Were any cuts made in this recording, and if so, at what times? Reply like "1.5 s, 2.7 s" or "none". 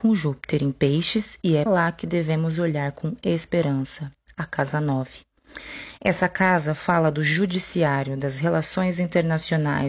1.7 s